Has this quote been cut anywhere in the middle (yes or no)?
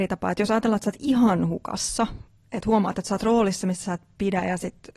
no